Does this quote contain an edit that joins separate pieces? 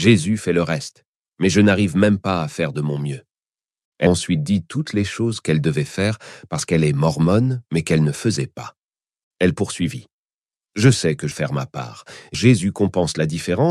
yes; 3 cuts; at 4.1 s, 11.3 s, 12.3 s

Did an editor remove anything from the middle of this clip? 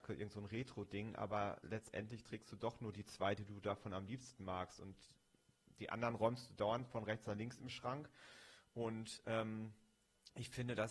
no; 0 cuts

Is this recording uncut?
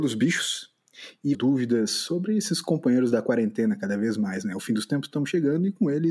no; 1 cut; at 1.3 s

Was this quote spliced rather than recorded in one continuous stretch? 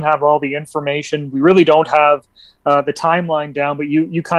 no; 0 cuts

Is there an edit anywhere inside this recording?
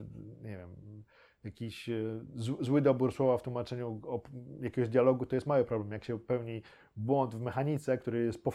no; 0 cuts

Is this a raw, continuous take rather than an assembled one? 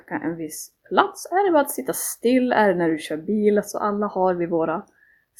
yes; 0 cuts

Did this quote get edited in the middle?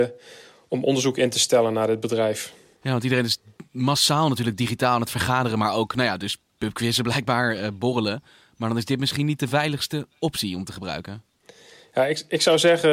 no; 0 cuts

